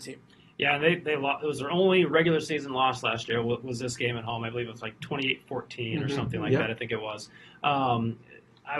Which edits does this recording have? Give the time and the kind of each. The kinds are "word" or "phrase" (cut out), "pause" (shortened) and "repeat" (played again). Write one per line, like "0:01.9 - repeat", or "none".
none

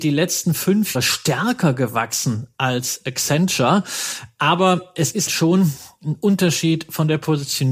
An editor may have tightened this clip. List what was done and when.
0:00.9 - word
0:05.3 - word

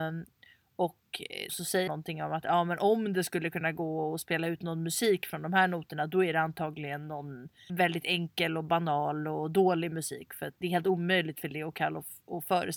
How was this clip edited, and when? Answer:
0:01.5 - word
0:01.9 - word
0:07.7 - word
0:10.6 - word

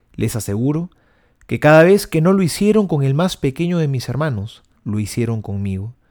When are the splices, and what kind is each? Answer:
0:04.8 - word

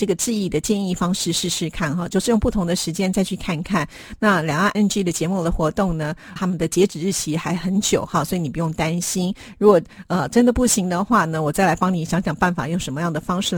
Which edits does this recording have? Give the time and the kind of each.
0:04.7 - word
0:06.4 - word

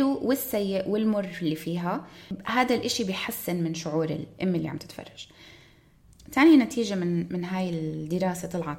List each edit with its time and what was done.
none

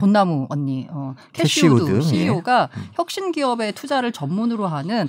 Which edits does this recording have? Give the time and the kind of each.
none

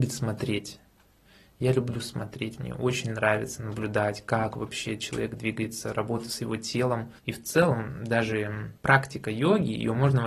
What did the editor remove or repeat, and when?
0:07.2 - pause
0:08.8 - pause

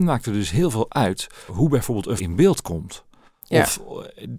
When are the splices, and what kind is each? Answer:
0:01.5 - word
0:02.2 - word

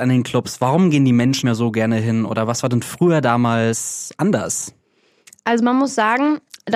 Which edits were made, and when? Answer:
0:01.4 - word

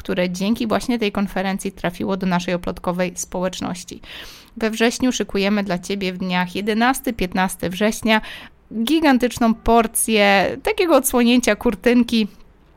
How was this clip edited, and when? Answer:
none

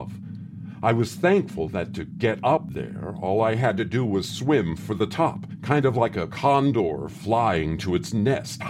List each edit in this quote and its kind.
none

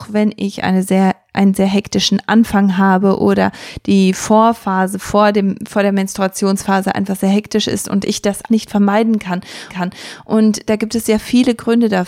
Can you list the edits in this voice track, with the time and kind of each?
0:08.5 - word
0:09.7 - repeat

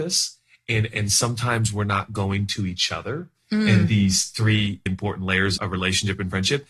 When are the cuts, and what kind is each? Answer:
0:04.9 - word
0:05.6 - word

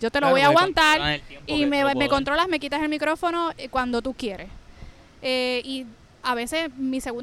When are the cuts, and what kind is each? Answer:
0:03.6 - word

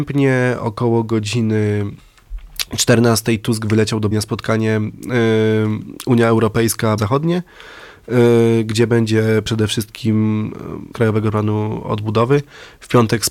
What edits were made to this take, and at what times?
0:04.1 - word
0:07.0 - word
0:10.9 - phrase

